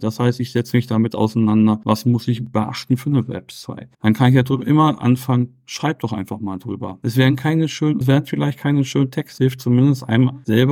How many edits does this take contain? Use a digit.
3